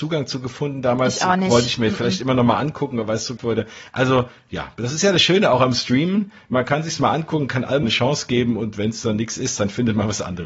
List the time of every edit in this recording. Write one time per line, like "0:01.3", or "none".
0:03.4
0:07.8